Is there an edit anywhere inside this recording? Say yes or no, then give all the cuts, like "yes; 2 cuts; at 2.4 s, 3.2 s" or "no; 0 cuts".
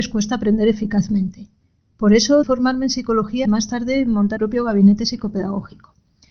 yes; 3 cuts; at 2.4 s, 3.5 s, 4.4 s